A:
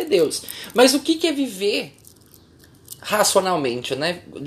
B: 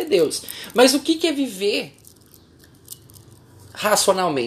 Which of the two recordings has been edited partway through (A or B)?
A